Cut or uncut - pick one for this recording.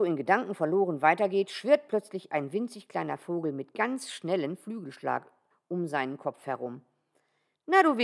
uncut